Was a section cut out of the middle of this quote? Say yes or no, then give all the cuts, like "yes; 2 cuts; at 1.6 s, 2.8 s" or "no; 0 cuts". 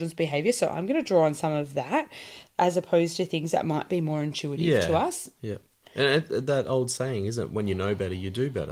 no; 0 cuts